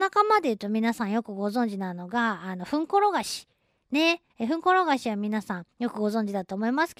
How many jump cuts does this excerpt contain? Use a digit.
2